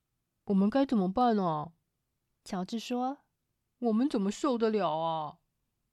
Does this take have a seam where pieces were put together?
no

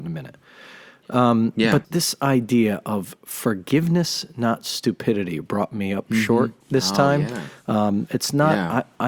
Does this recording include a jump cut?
yes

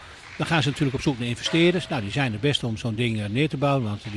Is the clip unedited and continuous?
yes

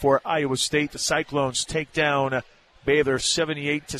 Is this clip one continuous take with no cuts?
yes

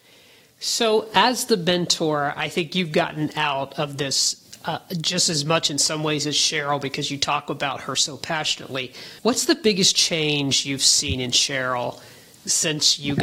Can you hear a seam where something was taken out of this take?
yes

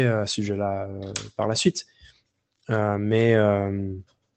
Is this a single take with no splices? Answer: yes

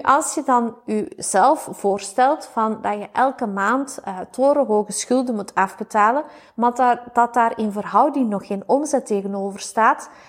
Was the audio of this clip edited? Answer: no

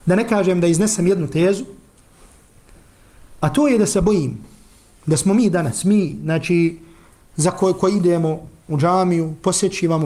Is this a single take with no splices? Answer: yes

